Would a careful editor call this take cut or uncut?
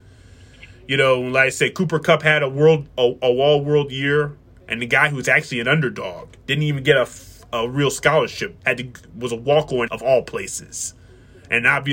cut